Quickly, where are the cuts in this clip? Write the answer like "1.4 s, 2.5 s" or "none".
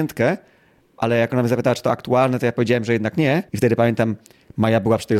3.5 s